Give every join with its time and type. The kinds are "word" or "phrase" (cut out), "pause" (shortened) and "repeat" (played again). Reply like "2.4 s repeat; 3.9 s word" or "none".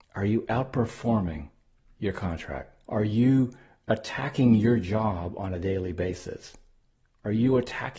2.8 s pause